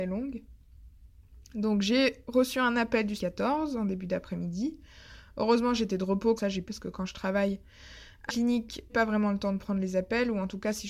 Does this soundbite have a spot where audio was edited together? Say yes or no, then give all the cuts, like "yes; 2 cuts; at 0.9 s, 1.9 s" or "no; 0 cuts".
yes; 5 cuts; at 3.2 s, 6.4 s, 6.7 s, 8.3 s, 8.9 s